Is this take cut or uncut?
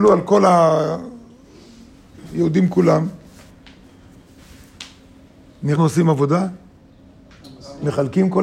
cut